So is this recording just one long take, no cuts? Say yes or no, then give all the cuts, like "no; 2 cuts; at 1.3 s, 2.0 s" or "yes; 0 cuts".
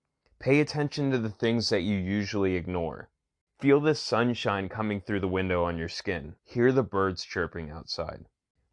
no; 1 cut; at 6.4 s